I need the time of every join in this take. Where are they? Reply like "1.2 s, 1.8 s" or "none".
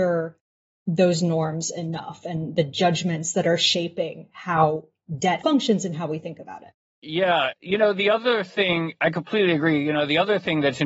5.4 s